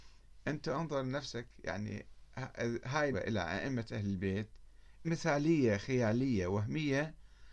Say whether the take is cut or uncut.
cut